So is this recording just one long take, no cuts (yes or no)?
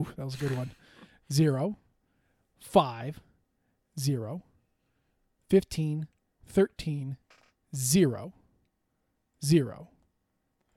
yes